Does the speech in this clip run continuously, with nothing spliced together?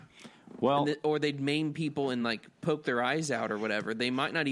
yes; 0 cuts

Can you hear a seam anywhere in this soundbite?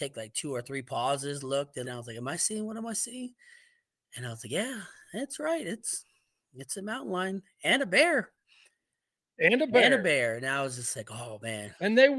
yes; 1 cut; at 1.8 s

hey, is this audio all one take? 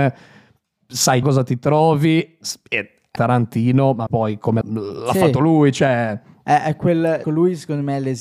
no; 5 cuts; at 1.2 s, 3.2 s, 4.1 s, 4.6 s, 7.2 s

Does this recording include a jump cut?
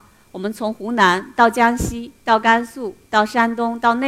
no; 0 cuts

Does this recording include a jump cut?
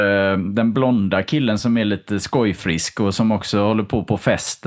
no; 0 cuts

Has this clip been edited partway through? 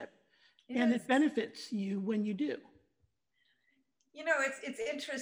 no; 0 cuts

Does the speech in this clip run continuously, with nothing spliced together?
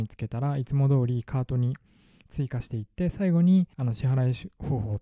no; 1 cut; at 3.7 s

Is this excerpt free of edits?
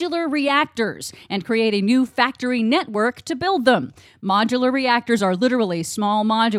yes; 0 cuts

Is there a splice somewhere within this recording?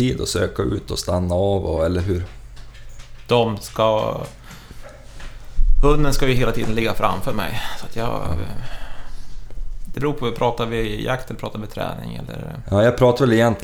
no; 0 cuts

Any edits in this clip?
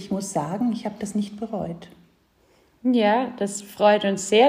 no; 0 cuts

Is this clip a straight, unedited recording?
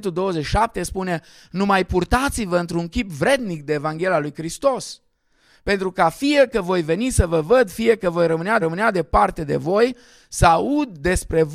no; 1 cut; at 8.6 s

